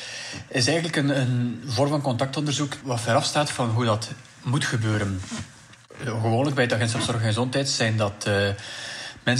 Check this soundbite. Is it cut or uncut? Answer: cut